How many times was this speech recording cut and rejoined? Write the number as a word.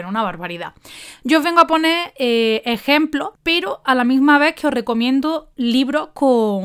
one